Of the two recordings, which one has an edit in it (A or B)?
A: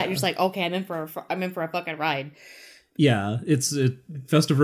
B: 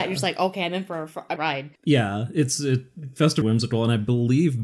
B